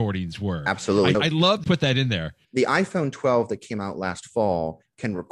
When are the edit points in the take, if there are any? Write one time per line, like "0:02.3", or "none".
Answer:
0:01.1
0:01.6
0:02.4